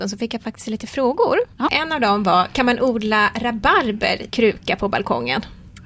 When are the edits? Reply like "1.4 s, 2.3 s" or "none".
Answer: 4.3 s